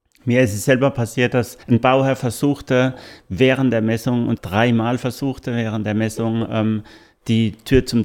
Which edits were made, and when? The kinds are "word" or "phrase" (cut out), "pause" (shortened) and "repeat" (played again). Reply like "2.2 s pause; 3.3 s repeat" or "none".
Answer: 1.6 s pause; 4.4 s word